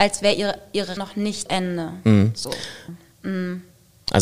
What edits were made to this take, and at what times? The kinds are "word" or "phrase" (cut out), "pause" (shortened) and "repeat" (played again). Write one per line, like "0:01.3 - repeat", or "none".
0:01.0 - word
0:01.5 - word